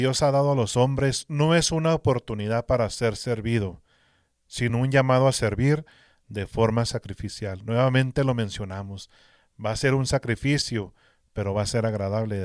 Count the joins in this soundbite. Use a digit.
0